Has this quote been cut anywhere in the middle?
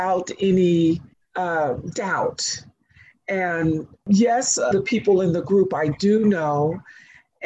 yes; 2 cuts; at 1.1 s, 4.7 s

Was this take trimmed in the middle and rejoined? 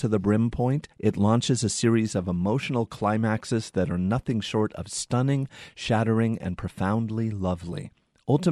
yes; 1 cut; at 0.9 s

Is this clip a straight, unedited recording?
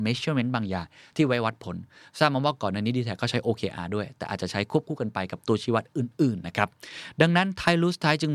yes; 0 cuts

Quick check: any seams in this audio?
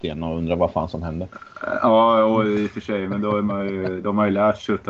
no; 0 cuts

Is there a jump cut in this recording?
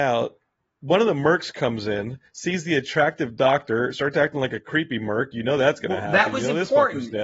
no; 0 cuts

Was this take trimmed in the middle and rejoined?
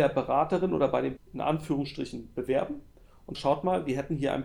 yes; 2 cuts; at 1.2 s, 3.3 s

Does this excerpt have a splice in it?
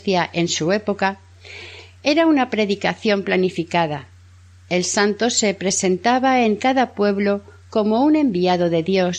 no; 0 cuts

